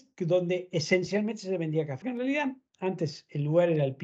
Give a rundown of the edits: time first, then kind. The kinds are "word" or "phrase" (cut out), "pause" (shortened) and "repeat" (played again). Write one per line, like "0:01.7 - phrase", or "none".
0:02.0 - word